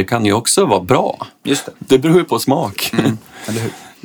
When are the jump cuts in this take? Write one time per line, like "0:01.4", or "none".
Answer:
0:01.8